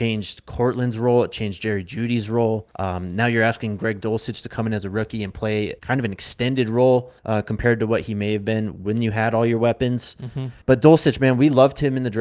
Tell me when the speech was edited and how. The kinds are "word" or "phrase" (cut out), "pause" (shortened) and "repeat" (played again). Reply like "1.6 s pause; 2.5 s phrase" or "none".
2.7 s pause; 5.8 s pause; 7.2 s pause; 10.6 s pause